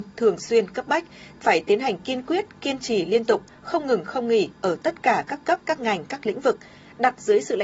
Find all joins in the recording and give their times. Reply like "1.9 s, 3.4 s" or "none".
none